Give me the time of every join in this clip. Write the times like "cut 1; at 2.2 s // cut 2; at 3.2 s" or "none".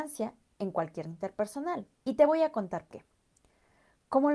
cut 1; at 1.0 s // cut 2; at 1.9 s // cut 3; at 2.9 s